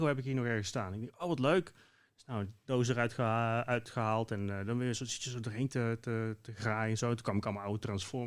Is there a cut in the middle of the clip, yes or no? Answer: no